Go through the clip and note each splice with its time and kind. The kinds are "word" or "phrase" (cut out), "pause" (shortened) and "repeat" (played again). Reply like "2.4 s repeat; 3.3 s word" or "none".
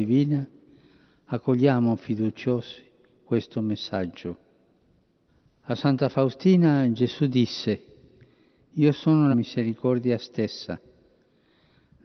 5.3 s pause; 9.3 s phrase